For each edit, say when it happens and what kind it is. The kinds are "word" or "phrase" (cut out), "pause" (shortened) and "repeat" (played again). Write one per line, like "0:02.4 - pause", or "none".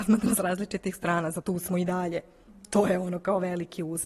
0:01.4 - word